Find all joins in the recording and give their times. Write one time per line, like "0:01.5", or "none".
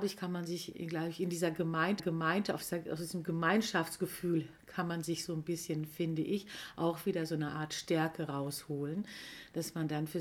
0:02.0